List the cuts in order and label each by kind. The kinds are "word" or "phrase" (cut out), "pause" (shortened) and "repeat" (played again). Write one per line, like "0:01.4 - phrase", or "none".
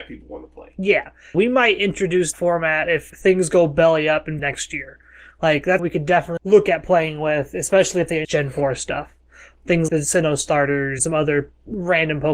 0:01.3 - word
0:02.3 - word
0:03.1 - word
0:04.4 - word
0:05.8 - word
0:06.4 - word
0:08.2 - word
0:09.9 - word
0:11.0 - word